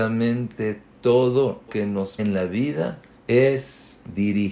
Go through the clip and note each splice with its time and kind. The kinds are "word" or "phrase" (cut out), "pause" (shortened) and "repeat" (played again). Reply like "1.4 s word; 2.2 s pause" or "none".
1.7 s word; 2.2 s word; 3.2 s pause